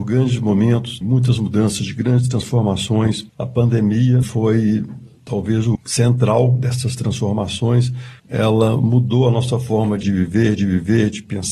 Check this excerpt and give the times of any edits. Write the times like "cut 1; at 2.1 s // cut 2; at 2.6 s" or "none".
cut 1; at 1.0 s // cut 2; at 3.3 s // cut 3; at 4.2 s // cut 4; at 5.7 s // cut 5; at 8.2 s // cut 6; at 10.0 s // cut 7; at 10.6 s